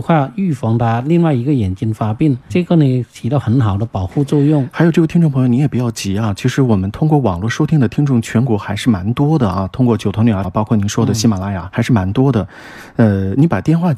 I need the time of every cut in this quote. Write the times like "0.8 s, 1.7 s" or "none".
2.5 s, 10.4 s, 11.7 s